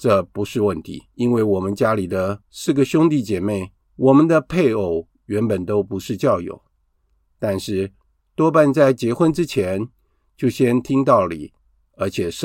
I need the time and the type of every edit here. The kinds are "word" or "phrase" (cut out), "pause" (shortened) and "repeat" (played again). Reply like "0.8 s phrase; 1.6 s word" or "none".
1.1 s pause; 2.4 s pause; 3.8 s pause; 5.1 s pause

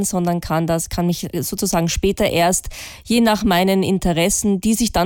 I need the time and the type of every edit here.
none

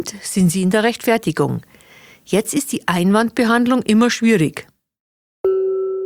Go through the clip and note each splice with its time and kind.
none

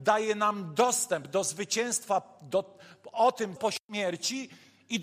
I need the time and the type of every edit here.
3.1 s word; 3.6 s word

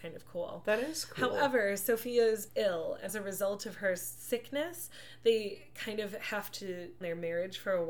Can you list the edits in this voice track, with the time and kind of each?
2.5 s word; 3.1 s word; 7.0 s word

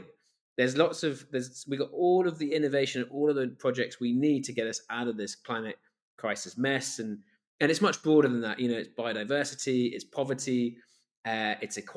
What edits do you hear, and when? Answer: none

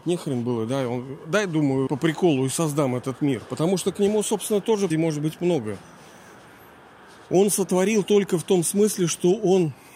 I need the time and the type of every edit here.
1.9 s word; 4.9 s word

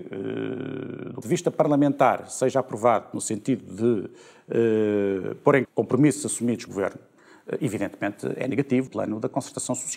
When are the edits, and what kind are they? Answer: 1.2 s word; 5.6 s word; 6.7 s word; 8.9 s word

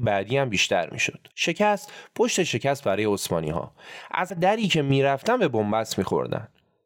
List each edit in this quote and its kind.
1.3 s pause; 4.3 s word

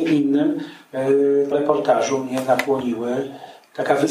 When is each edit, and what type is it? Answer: 1.5 s word

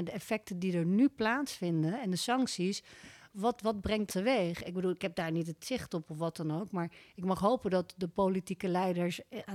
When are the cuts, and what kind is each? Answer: 4.1 s word; 5.0 s phrase

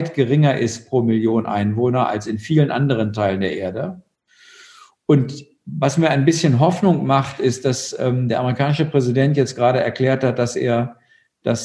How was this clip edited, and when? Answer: none

